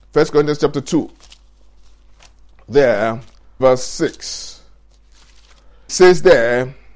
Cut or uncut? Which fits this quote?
cut